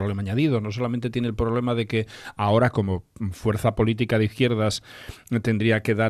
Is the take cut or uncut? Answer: uncut